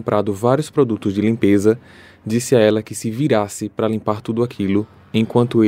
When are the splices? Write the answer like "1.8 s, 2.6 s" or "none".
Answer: none